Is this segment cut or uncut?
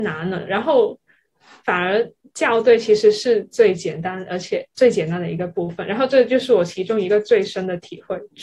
uncut